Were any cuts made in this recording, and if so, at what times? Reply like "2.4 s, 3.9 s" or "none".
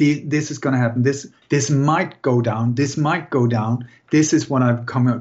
none